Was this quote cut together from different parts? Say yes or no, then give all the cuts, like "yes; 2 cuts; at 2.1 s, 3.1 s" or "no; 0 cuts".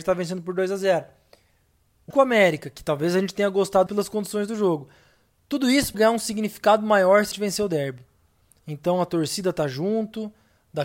yes; 4 cuts; at 2.1 s, 3.9 s, 5.9 s, 7.3 s